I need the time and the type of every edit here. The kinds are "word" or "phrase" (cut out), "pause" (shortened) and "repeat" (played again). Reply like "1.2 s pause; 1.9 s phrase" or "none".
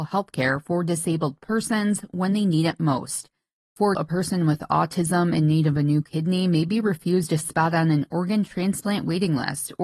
3.9 s word